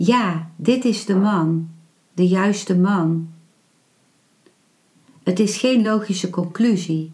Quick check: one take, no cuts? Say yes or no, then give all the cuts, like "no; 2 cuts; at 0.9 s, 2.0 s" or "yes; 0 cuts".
yes; 0 cuts